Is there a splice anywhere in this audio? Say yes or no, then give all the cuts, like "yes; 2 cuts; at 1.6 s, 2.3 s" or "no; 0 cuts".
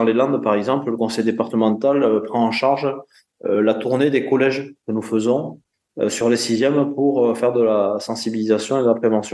no; 0 cuts